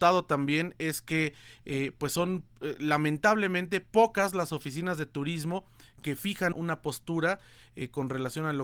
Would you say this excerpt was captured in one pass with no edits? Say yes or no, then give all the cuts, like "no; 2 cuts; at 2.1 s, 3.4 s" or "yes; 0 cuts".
no; 1 cut; at 6.5 s